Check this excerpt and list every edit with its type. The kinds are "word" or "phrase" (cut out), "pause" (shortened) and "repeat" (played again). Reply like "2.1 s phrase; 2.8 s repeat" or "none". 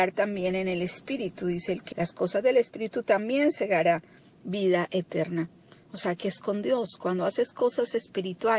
1.9 s word